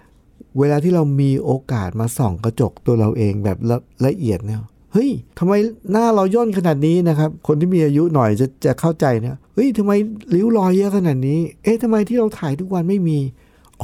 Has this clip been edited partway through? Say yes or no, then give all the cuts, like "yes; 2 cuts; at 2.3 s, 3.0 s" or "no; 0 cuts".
yes; 4 cuts; at 5.3 s, 7.4 s, 9.4 s, 11.6 s